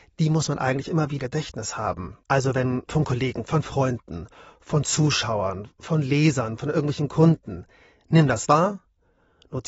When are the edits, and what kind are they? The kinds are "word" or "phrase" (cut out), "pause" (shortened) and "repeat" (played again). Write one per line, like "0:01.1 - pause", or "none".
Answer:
0:01.2 - word
0:02.9 - word
0:03.4 - word